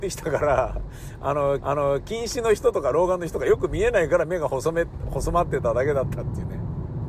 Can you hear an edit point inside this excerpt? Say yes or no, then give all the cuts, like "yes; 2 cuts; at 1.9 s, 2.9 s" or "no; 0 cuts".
yes; 1 cut; at 1.6 s